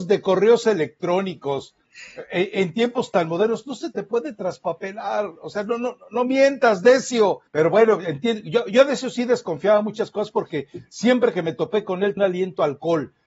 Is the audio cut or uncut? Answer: cut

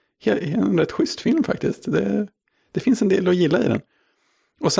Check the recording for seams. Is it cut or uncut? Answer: uncut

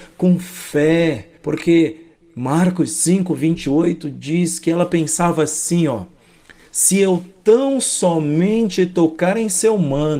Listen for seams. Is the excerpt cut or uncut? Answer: cut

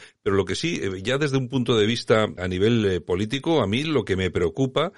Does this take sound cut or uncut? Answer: cut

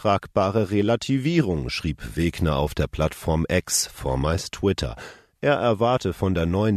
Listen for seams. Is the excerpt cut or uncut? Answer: uncut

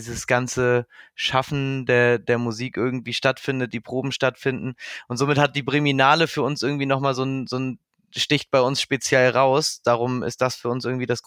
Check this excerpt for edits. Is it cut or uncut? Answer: uncut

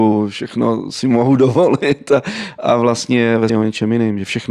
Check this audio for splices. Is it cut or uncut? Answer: cut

